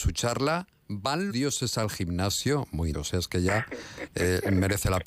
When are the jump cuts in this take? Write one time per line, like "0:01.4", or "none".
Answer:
0:01.3
0:02.9